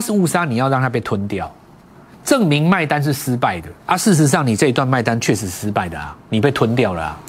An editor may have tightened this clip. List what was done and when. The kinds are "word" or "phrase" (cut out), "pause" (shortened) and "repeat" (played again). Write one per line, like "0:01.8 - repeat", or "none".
0:03.8 - pause